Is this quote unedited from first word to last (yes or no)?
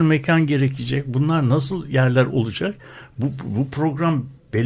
yes